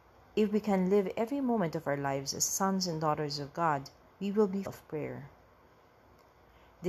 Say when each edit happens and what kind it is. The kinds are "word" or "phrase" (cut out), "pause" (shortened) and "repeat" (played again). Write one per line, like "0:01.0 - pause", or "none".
0:04.1 - pause
0:04.6 - word